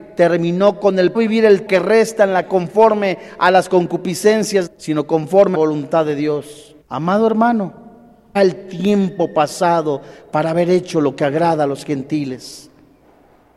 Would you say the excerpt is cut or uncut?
cut